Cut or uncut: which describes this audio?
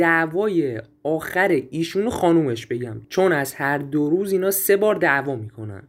uncut